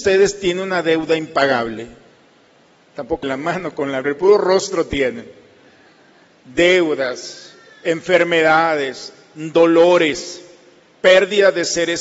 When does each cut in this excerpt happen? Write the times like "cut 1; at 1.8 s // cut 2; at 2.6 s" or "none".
cut 1; at 3.2 s // cut 2; at 4.0 s

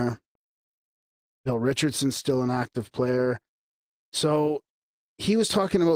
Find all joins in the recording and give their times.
none

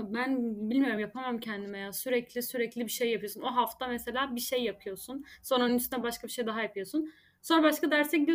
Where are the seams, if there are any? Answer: none

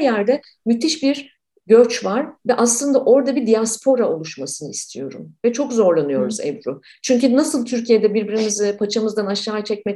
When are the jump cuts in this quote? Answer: none

